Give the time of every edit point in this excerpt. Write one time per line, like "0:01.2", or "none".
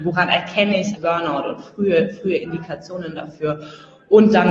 0:01.0